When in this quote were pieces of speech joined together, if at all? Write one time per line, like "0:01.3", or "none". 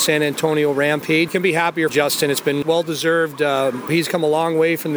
0:01.3
0:01.9
0:02.6
0:03.9